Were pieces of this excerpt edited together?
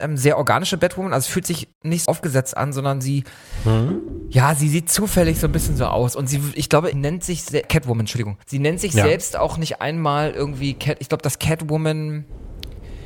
yes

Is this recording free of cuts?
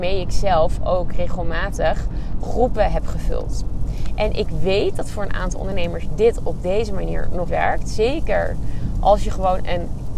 no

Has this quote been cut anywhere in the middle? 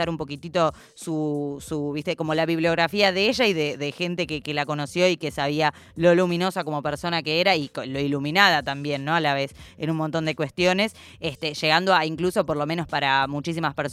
no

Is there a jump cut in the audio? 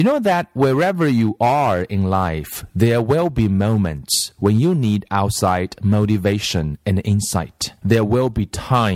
yes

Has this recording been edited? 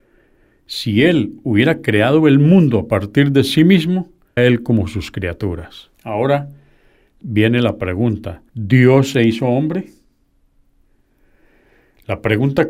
yes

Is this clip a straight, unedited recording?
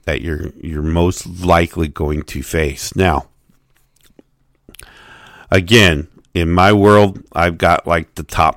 yes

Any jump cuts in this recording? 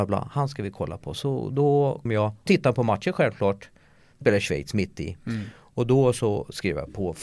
yes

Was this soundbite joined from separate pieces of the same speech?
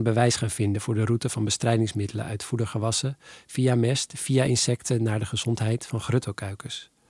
no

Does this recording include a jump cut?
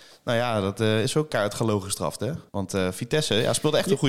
yes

